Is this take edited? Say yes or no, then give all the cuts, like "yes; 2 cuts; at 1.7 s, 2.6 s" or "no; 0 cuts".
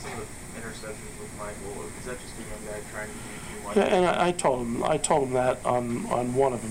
no; 0 cuts